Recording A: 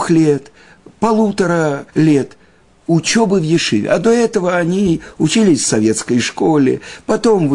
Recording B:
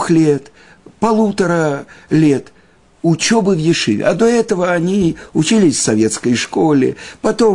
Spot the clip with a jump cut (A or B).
A